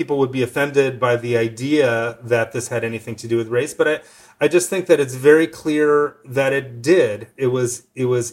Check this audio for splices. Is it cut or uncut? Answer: uncut